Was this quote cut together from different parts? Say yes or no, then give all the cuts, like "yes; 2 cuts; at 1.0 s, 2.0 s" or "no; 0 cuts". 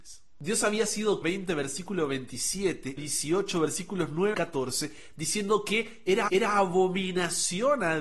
yes; 4 cuts; at 1.2 s, 3.0 s, 4.3 s, 6.3 s